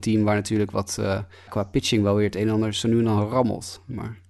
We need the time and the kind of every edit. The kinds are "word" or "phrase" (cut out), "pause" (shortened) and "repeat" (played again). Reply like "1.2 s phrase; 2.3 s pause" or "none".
1.5 s word